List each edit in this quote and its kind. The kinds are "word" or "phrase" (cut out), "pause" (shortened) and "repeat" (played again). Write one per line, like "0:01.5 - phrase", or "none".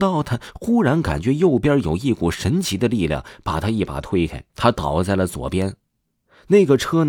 0:04.5 - pause